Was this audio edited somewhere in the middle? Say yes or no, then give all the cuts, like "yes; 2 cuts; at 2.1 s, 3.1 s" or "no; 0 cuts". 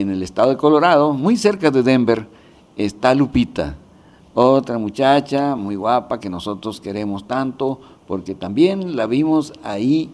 no; 0 cuts